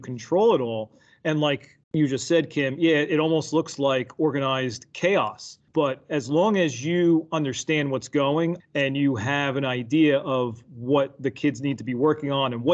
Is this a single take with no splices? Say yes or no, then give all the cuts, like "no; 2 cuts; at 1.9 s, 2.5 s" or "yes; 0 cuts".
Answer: no; 3 cuts; at 1.8 s, 5.7 s, 8.6 s